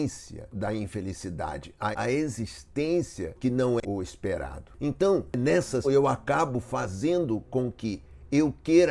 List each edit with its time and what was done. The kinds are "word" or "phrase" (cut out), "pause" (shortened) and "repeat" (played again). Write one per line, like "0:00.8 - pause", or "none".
0:01.9 - phrase
0:03.4 - word
0:03.8 - phrase
0:05.8 - word